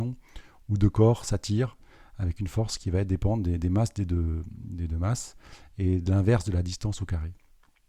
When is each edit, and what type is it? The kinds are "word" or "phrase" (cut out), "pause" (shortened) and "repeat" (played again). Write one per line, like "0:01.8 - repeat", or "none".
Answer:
none